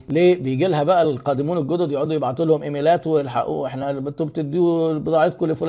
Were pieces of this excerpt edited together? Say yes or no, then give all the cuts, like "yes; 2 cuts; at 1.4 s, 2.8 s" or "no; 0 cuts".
no; 0 cuts